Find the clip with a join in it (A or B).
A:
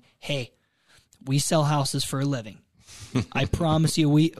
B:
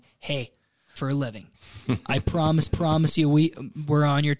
B